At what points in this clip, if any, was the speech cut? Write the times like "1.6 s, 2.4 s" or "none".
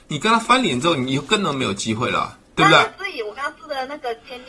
2.4 s